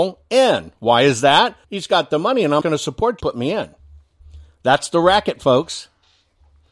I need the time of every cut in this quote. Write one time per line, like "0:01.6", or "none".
0:01.6
0:02.6
0:03.2